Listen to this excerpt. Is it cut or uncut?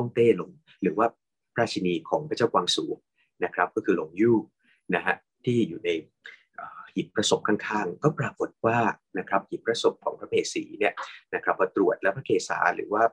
uncut